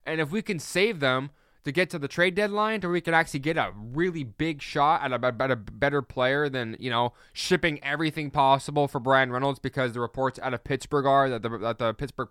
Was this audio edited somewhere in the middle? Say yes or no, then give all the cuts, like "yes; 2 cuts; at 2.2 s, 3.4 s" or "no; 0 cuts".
no; 0 cuts